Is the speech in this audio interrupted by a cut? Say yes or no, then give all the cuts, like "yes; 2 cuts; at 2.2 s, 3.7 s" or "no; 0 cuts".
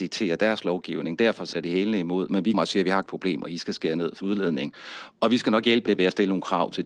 yes; 5 cuts; at 1.5 s, 2.5 s, 3.1 s, 4.2 s, 5.9 s